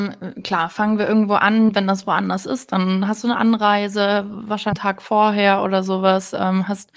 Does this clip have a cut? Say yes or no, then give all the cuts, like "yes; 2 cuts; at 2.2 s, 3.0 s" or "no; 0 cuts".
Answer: no; 0 cuts